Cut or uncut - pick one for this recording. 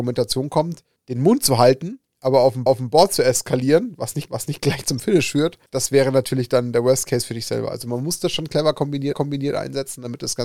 cut